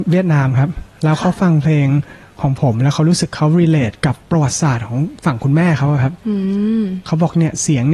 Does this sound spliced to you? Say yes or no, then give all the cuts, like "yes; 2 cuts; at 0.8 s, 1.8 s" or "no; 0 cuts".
yes; 1 cut; at 4.2 s